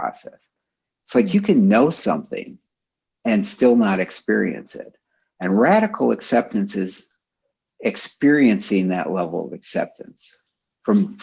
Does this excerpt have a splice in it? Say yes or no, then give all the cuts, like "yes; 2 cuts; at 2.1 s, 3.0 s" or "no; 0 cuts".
no; 0 cuts